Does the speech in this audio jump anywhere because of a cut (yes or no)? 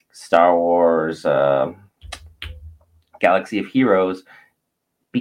no